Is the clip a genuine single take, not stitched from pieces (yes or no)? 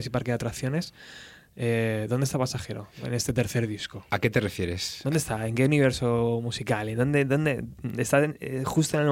yes